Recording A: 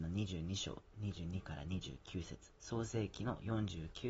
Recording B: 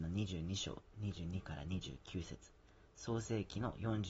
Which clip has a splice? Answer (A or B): A